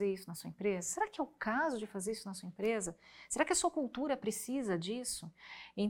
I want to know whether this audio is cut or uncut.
uncut